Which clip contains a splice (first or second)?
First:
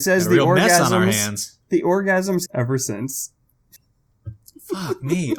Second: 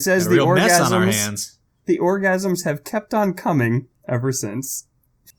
first